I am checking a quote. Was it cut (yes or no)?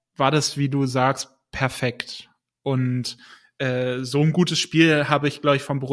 no